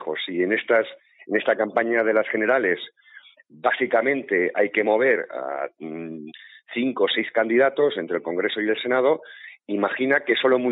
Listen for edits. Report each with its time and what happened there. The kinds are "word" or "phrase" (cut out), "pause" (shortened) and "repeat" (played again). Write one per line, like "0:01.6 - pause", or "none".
none